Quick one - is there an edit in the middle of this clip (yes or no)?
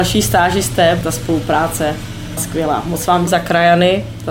yes